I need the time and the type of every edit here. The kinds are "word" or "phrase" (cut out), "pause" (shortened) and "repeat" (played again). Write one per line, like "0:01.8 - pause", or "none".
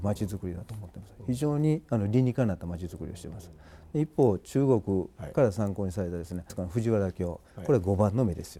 0:06.5 - phrase